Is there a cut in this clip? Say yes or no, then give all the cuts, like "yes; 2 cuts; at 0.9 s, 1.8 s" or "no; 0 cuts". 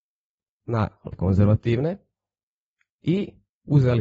yes; 1 cut; at 1.1 s